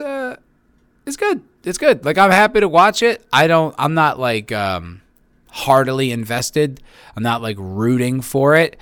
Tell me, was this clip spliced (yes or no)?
no